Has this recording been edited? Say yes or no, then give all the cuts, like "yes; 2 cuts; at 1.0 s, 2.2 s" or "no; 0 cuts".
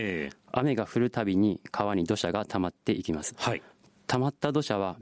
no; 0 cuts